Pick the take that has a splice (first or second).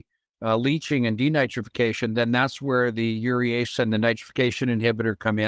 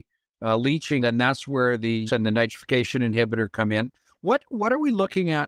second